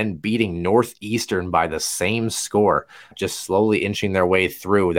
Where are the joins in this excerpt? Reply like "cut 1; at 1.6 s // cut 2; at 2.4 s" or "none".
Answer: cut 1; at 3.1 s